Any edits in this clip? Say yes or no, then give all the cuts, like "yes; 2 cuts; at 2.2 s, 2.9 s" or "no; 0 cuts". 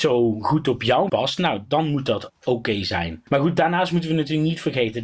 yes; 2 cuts; at 1.1 s, 2.3 s